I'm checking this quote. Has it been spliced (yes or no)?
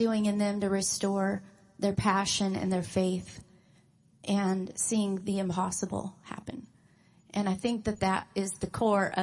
no